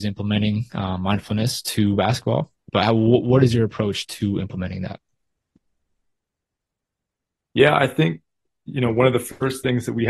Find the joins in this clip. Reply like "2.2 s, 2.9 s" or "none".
none